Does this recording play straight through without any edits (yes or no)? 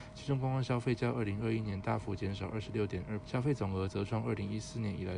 no